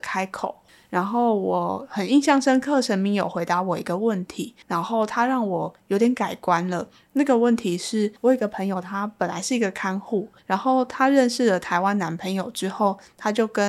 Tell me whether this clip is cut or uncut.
cut